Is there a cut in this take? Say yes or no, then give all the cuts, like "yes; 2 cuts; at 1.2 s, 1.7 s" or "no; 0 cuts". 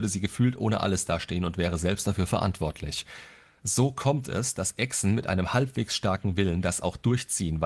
no; 0 cuts